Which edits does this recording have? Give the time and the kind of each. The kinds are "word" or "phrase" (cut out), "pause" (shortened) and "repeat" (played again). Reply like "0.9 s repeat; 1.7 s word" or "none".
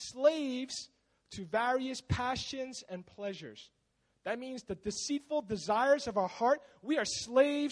none